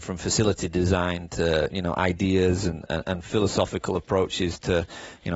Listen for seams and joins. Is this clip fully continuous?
yes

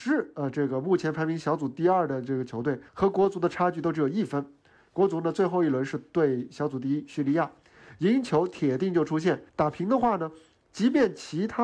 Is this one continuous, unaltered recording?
no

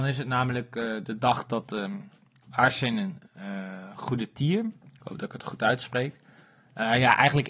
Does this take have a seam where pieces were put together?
no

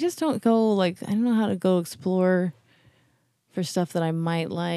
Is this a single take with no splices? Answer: yes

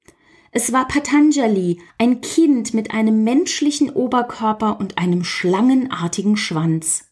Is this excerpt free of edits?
no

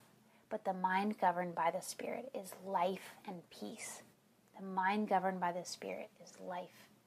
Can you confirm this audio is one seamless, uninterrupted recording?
no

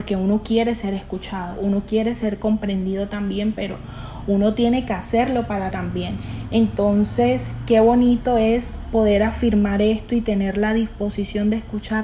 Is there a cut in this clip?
yes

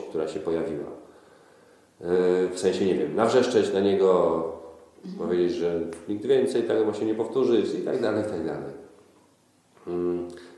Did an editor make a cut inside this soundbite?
no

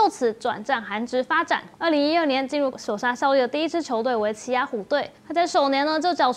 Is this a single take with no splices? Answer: no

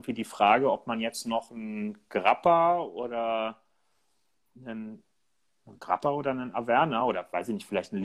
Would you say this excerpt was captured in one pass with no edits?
yes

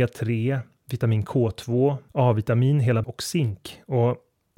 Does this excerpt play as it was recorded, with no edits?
no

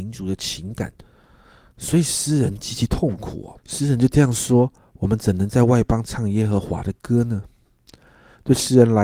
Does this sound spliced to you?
yes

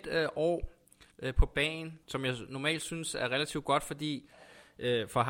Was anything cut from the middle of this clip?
yes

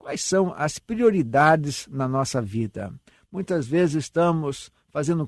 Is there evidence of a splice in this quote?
no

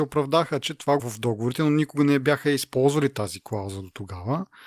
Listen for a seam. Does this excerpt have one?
yes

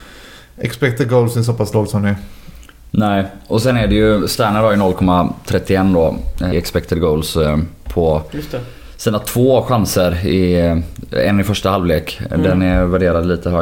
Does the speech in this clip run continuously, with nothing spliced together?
no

